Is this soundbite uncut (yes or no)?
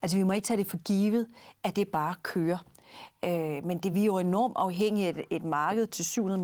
yes